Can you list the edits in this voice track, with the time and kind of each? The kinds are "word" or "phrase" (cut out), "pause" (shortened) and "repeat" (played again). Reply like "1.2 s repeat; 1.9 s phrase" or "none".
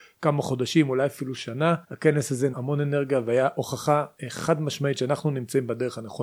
1.8 s pause; 2.5 s word; 4.2 s pause